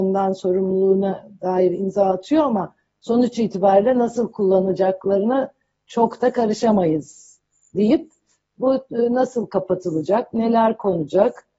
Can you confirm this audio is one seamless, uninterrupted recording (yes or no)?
yes